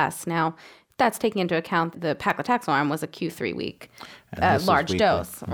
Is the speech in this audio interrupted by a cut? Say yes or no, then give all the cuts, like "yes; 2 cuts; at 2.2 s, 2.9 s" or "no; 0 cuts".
yes; 1 cut; at 1.9 s